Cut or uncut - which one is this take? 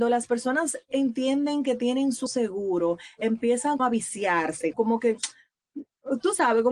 cut